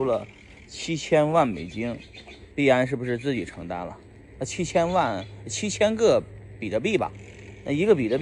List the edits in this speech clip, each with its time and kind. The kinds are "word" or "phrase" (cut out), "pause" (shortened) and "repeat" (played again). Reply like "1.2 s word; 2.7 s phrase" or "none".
2.5 s pause